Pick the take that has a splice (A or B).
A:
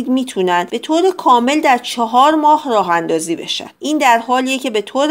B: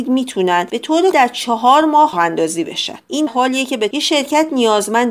B